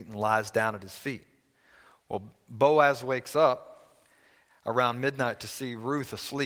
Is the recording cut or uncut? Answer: uncut